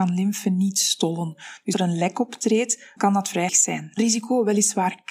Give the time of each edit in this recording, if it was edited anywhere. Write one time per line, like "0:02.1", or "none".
0:01.7
0:03.0
0:03.5
0:04.0